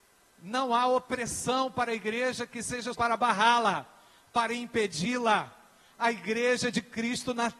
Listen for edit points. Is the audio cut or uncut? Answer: cut